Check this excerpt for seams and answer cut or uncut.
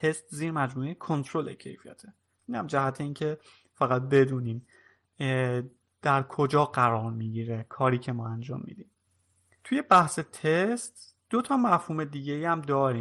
uncut